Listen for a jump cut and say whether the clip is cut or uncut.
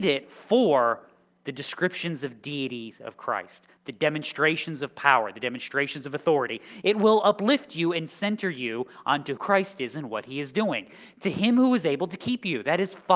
cut